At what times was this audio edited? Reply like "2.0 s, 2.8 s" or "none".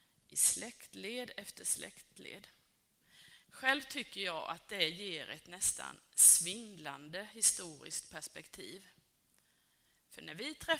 3.4 s